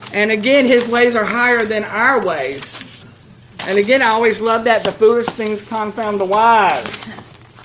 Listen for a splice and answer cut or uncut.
uncut